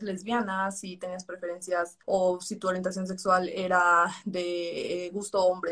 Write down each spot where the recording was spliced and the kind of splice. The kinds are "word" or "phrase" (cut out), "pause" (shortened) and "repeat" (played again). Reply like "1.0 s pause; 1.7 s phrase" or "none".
2.0 s pause